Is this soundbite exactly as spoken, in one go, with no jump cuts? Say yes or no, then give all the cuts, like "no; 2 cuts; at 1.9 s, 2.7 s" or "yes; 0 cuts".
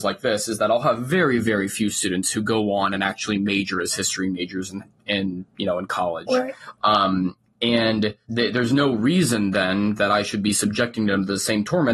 no; 1 cut; at 8.2 s